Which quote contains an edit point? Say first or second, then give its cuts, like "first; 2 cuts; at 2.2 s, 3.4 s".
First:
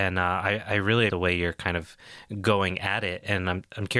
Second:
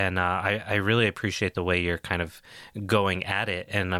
first; 1 cut; at 1.1 s